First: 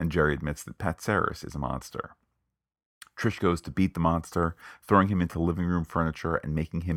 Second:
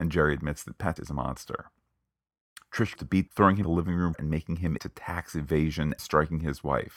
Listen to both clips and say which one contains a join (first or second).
second